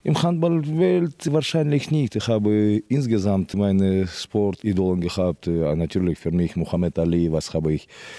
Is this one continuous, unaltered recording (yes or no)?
yes